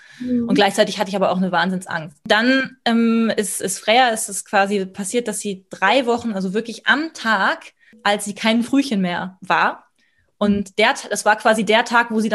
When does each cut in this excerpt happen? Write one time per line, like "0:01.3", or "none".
none